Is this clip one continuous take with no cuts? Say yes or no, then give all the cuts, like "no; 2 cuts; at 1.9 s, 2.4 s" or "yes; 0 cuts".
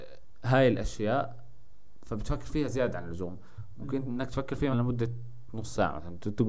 no; 1 cut; at 4.7 s